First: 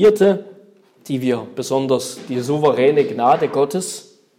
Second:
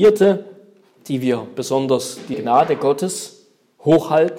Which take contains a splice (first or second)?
second